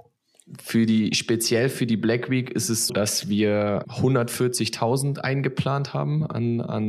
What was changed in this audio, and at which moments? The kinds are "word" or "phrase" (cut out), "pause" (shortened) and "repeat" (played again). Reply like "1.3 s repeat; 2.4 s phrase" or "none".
2.9 s word; 3.8 s word